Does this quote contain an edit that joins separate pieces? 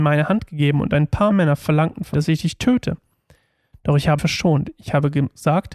yes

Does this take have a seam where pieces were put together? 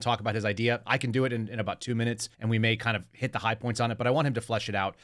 yes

